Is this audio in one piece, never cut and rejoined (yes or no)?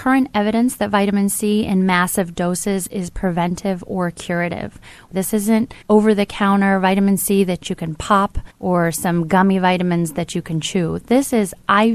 no